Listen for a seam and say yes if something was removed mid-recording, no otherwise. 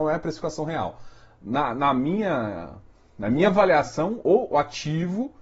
no